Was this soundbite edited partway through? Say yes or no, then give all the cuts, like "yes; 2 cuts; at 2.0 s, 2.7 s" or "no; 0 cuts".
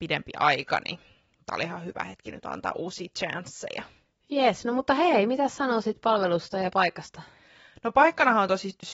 no; 0 cuts